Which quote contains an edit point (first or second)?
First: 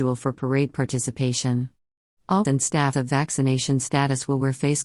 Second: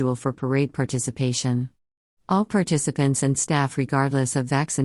first